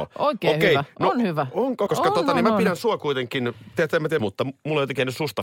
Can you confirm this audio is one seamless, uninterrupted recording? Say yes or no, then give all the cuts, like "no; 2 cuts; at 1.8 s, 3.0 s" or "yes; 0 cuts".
no; 2 cuts; at 1.9 s, 4.2 s